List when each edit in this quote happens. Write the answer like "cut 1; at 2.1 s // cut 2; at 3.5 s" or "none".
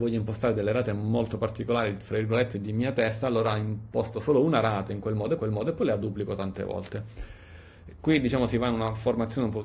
cut 1; at 5.4 s